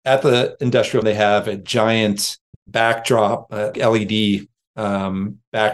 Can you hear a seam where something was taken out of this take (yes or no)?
yes